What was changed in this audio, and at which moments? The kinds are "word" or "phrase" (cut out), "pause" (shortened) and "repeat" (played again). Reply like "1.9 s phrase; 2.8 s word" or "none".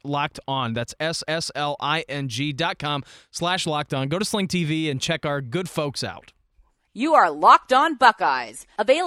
1.2 s repeat